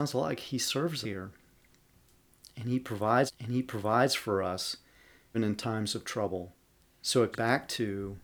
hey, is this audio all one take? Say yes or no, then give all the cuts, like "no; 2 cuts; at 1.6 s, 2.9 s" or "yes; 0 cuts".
no; 5 cuts; at 1.0 s, 3.3 s, 5.3 s, 6.6 s, 7.3 s